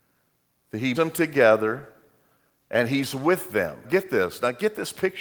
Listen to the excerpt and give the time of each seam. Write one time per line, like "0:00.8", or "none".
0:00.9
0:03.8